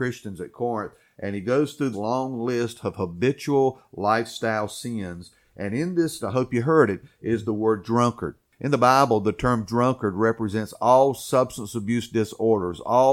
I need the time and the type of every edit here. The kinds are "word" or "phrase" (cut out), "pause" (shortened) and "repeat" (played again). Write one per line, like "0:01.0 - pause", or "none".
0:01.9 - word
0:06.2 - word